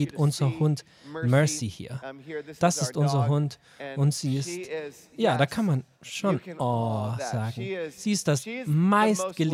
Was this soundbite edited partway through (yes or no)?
no